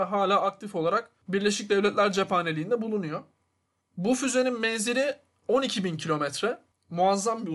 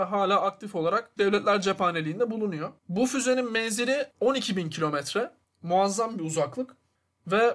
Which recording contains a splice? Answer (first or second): second